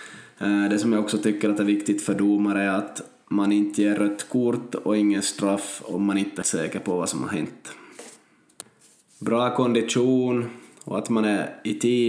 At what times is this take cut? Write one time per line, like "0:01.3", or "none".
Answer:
0:06.4

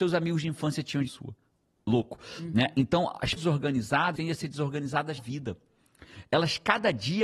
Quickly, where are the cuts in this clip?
0:01.1
0:03.4
0:04.1
0:05.2

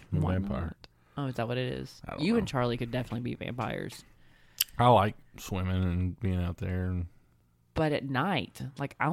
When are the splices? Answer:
none

